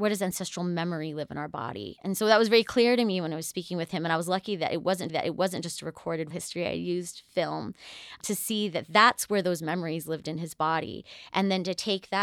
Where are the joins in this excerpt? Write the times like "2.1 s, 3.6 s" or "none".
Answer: 5.1 s, 6.3 s, 8.2 s